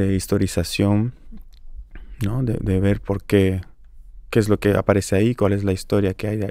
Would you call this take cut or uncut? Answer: uncut